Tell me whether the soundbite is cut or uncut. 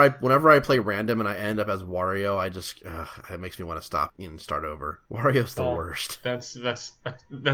cut